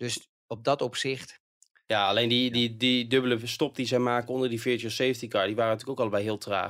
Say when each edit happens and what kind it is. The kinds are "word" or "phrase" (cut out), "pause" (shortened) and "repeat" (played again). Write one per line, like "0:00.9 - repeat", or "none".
none